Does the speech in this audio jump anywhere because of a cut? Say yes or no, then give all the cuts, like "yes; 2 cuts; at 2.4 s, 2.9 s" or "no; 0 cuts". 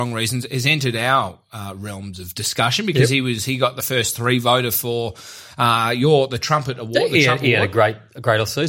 no; 0 cuts